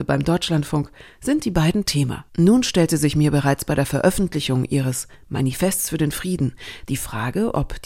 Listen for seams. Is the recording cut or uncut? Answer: cut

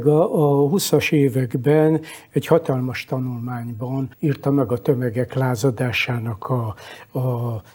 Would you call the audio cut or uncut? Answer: cut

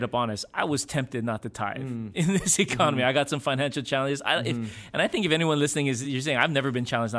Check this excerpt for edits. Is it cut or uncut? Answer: uncut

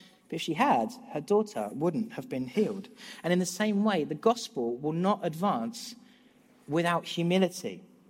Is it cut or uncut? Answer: uncut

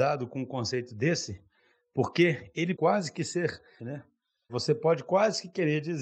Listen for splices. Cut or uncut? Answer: cut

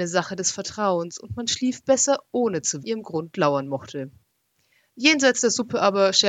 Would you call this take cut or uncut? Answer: cut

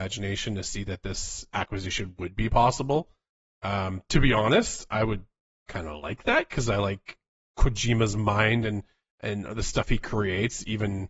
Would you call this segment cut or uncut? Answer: uncut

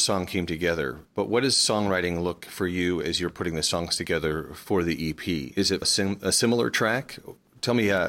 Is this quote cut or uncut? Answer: cut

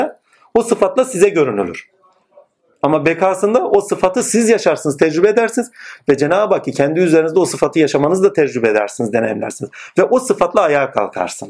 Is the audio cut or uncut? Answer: uncut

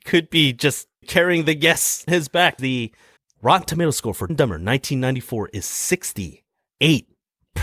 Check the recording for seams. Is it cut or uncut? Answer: cut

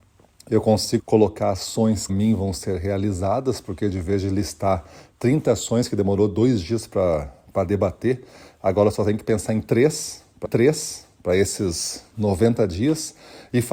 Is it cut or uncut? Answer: cut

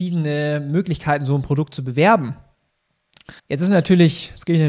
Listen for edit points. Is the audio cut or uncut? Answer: cut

